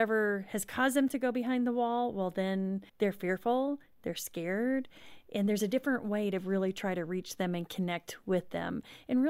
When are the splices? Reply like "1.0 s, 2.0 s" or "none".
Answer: 2.9 s